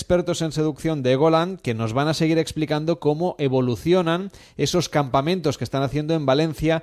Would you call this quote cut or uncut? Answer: uncut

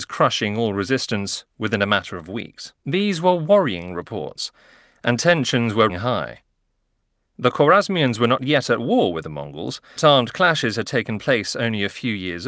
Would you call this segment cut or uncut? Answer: cut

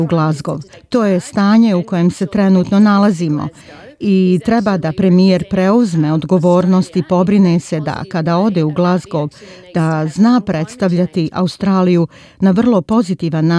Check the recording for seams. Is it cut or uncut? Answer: uncut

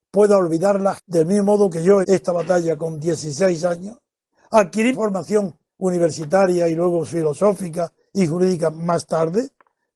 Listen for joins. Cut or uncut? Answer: cut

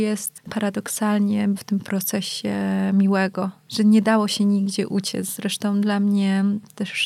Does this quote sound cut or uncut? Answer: uncut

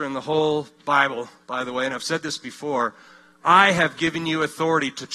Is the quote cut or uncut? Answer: uncut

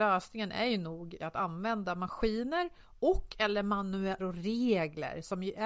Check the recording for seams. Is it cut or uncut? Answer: cut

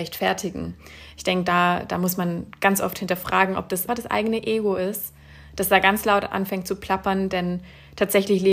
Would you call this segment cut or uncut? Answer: cut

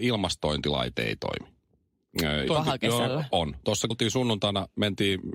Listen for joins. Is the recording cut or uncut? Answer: cut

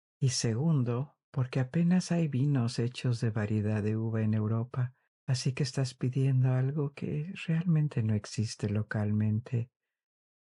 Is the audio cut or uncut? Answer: cut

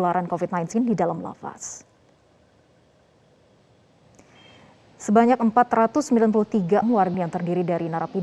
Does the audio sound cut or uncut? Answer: cut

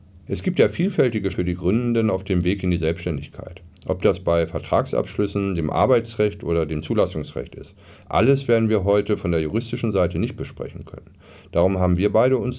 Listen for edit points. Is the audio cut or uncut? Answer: cut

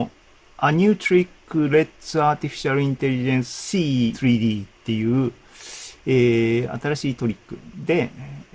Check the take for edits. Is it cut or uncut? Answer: cut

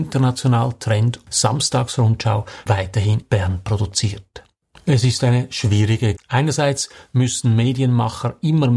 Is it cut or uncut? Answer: cut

